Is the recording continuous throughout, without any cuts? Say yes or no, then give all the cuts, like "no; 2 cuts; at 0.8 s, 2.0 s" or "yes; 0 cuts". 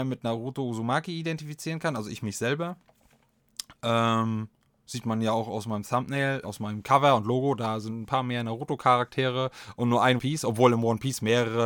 no; 3 cuts; at 4.5 s, 6.4 s, 10.2 s